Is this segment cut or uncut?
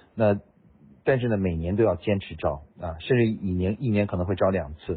cut